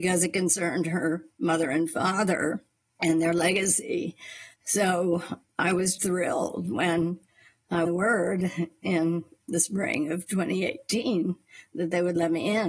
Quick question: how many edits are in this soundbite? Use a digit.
3